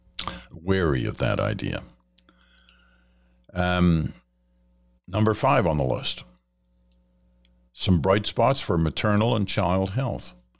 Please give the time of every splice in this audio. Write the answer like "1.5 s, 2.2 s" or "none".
none